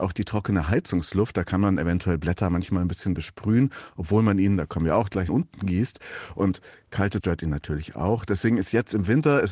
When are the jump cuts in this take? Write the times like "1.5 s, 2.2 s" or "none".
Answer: 5.3 s, 7.2 s